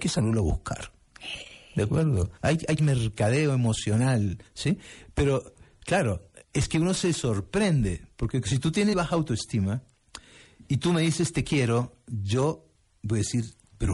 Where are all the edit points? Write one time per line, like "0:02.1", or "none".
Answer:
0:02.4
0:02.8
0:04.5
0:06.4
0:08.9
0:12.7